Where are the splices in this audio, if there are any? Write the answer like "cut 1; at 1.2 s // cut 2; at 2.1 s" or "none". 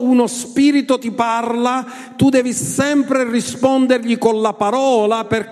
none